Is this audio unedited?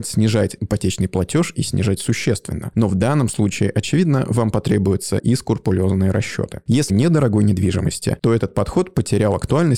no; 2 cuts; at 5.2 s, 6.9 s

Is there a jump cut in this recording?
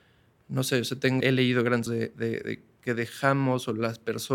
yes; 2 cuts; at 1.2 s, 1.9 s

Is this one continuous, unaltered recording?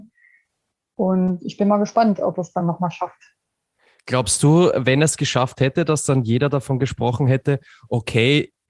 yes; 0 cuts

